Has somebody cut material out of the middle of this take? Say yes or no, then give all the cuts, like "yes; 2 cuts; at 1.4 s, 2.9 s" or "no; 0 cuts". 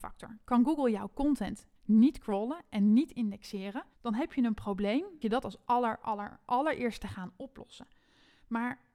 yes; 3 cuts; at 1.8 s, 3.9 s, 5.2 s